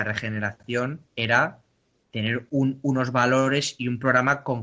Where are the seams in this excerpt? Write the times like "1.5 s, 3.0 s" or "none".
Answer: 1.1 s